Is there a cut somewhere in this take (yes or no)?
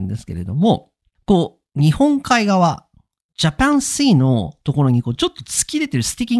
no